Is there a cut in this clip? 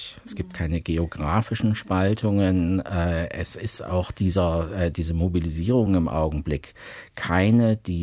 no; 0 cuts

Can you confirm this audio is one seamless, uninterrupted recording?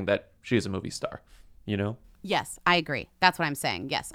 yes; 0 cuts

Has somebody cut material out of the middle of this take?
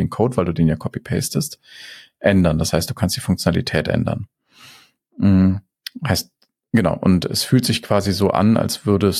no; 0 cuts

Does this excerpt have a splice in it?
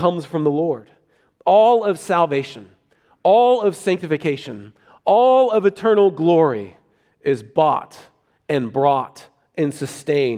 no; 0 cuts

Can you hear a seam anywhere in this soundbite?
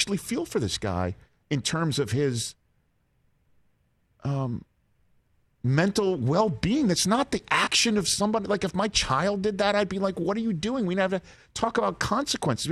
no; 0 cuts

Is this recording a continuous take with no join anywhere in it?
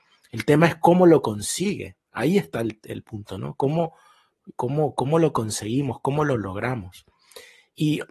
yes; 0 cuts

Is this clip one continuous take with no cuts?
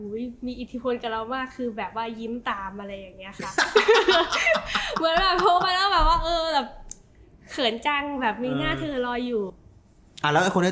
yes; 0 cuts

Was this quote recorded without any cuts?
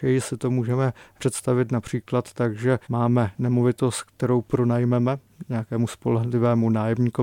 no; 1 cut; at 2.8 s

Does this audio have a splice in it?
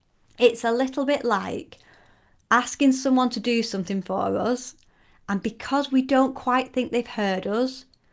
no; 0 cuts

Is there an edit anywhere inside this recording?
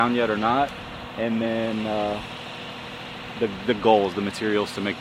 no; 0 cuts

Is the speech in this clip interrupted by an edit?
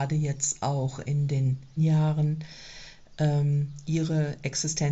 yes; 1 cut; at 1.8 s

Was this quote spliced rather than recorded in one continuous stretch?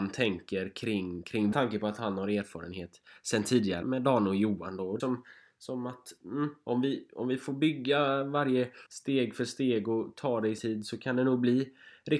yes; 5 cuts; at 1.5 s, 3.8 s, 5.0 s, 8.9 s, 10.6 s

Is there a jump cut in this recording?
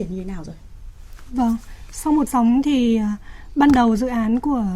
yes; 1 cut; at 2.3 s

